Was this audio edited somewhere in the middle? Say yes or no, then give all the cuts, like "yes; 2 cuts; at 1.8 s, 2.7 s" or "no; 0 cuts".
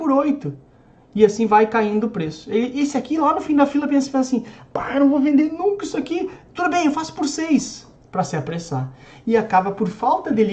no; 0 cuts